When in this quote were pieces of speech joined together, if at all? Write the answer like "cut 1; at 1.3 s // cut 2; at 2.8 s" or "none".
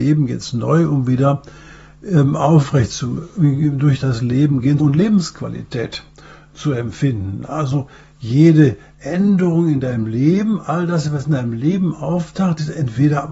cut 1; at 4.8 s